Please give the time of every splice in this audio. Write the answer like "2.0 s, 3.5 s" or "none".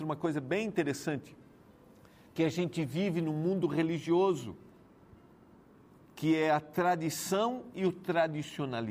none